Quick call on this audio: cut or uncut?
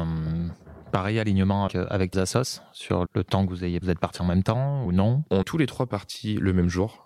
cut